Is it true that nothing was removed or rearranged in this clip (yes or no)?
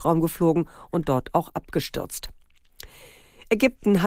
yes